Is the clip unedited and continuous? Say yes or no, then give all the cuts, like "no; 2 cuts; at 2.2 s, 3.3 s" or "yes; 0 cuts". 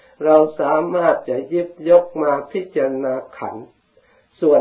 yes; 0 cuts